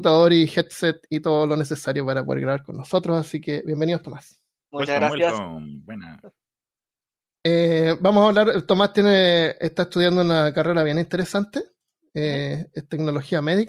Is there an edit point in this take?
no; 0 cuts

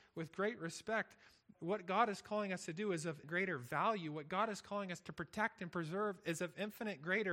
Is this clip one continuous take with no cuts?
no; 2 cuts; at 1.5 s, 3.2 s

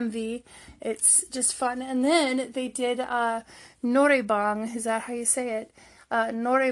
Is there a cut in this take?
no; 0 cuts

